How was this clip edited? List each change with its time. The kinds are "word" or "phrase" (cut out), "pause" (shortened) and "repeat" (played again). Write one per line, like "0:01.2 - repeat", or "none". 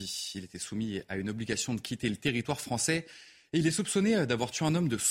none